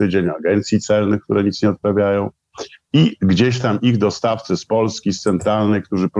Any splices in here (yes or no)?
no